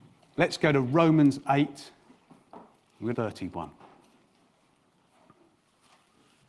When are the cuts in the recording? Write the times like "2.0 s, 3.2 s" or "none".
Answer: 3.1 s